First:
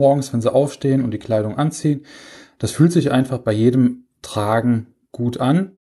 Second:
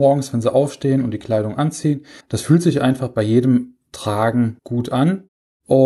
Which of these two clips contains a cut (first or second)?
second